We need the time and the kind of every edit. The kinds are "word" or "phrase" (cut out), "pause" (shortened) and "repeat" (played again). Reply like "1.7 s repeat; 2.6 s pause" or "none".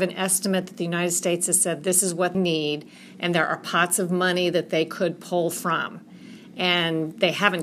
2.3 s word